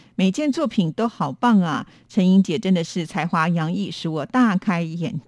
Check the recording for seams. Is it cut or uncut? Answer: uncut